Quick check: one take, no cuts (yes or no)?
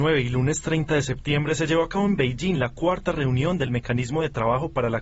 yes